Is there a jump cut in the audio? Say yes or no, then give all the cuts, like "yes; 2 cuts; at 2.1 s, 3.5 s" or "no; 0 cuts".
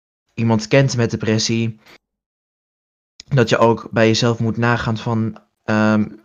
no; 0 cuts